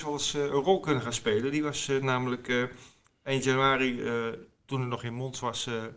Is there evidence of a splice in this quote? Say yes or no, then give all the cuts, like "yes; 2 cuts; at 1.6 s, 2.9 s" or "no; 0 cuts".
no; 0 cuts